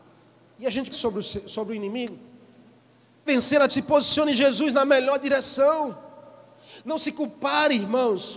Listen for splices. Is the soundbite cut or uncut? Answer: cut